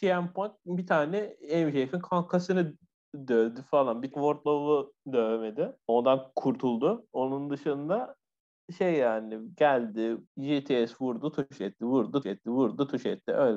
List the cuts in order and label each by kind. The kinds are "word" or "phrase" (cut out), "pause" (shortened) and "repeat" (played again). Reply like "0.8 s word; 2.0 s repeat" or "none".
4.1 s word; 5.8 s pause; 10.3 s pause; 12.2 s repeat